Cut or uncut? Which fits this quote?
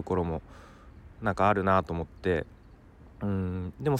cut